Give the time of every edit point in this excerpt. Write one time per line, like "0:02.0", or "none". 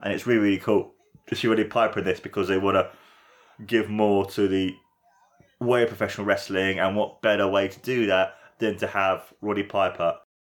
none

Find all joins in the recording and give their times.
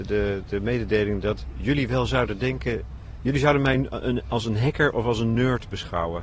none

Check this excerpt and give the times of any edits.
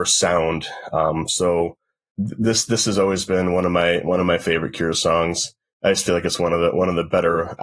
none

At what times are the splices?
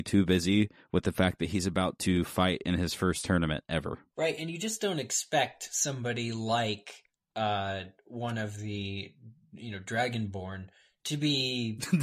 none

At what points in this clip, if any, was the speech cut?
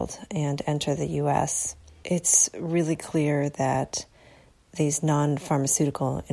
none

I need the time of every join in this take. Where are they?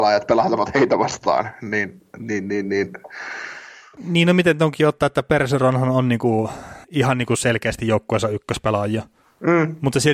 0:06.8

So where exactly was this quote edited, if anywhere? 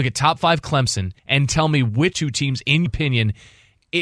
0:01.2
0:02.1
0:02.9

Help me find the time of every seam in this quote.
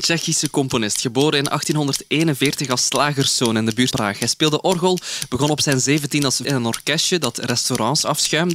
0:03.9
0:06.4

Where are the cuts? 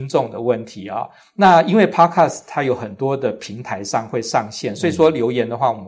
none

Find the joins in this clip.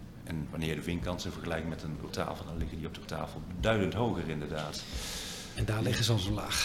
0:02.1
0:03.0

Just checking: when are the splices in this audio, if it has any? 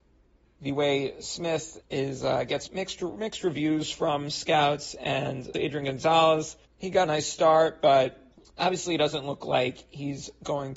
0:01.8
0:02.7
0:05.5
0:06.7
0:07.1
0:08.3

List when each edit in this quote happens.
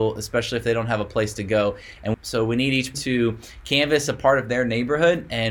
0:02.1
0:02.9

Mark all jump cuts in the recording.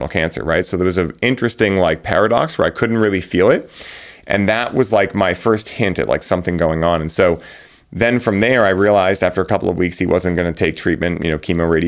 none

